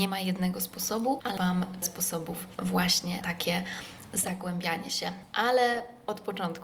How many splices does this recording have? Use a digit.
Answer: 3